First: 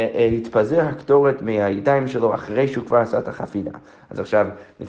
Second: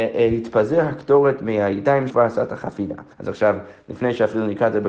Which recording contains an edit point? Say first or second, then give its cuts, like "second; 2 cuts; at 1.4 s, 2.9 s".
second; 2 cuts; at 2.1 s, 3.1 s